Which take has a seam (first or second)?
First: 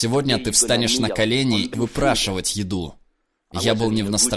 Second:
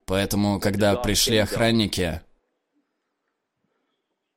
first